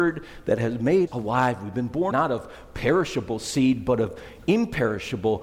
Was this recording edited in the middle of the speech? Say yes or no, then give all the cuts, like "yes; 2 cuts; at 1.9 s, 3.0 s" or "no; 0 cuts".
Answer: yes; 2 cuts; at 1.1 s, 2.1 s